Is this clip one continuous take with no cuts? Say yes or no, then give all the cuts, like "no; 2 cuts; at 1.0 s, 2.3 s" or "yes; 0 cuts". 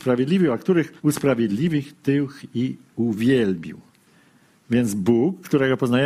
no; 2 cuts; at 1.0 s, 4.1 s